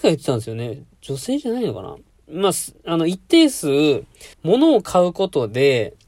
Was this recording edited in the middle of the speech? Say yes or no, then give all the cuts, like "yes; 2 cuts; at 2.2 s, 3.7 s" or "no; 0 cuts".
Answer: yes; 2 cuts; at 2.1 s, 4.3 s